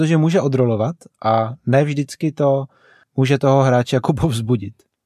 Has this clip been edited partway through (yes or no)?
no